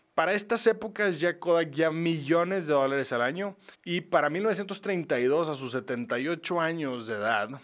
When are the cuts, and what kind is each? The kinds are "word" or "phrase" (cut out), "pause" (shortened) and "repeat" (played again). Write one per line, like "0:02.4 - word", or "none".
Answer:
0:01.9 - word
0:03.7 - pause